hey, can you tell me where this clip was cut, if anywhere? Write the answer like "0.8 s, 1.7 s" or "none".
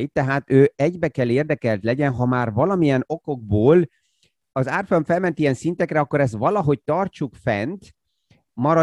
none